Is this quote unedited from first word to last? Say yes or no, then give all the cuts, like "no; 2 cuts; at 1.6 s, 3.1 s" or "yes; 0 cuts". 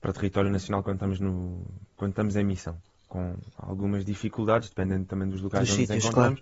yes; 0 cuts